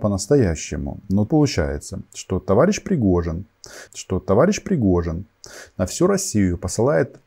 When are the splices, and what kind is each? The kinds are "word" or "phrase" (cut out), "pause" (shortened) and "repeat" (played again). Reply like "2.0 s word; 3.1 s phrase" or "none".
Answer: 1.3 s word; 3.9 s repeat